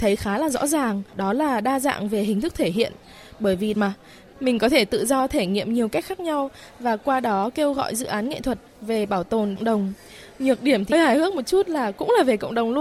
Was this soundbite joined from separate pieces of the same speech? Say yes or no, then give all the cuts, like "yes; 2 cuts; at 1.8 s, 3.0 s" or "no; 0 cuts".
yes; 4 cuts; at 1.1 s, 3.7 s, 9.6 s, 10.9 s